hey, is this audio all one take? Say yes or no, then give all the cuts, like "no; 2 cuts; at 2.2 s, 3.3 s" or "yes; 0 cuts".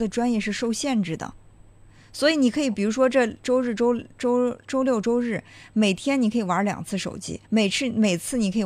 no; 1 cut; at 7.4 s